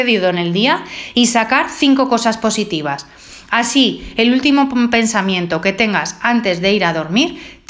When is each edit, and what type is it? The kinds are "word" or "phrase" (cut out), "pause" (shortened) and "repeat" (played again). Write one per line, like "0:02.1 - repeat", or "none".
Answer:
none